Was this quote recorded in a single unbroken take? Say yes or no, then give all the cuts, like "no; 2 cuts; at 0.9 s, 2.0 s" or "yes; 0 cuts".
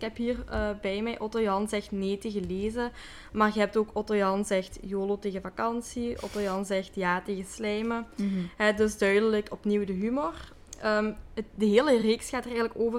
yes; 0 cuts